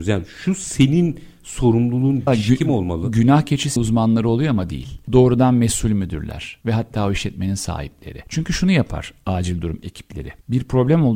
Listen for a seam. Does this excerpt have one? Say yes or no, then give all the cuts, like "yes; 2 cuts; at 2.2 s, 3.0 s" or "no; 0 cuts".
yes; 2 cuts; at 2.3 s, 3.8 s